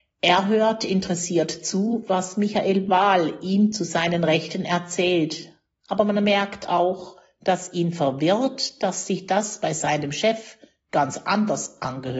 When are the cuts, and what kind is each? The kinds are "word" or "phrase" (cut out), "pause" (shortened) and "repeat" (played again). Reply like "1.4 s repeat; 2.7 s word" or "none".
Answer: none